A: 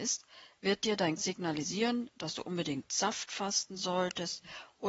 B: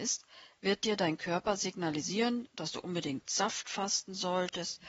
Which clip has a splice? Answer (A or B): A